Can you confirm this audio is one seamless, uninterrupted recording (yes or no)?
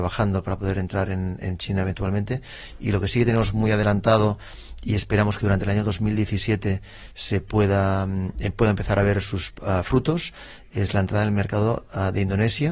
yes